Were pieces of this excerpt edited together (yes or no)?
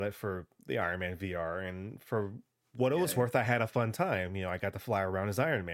no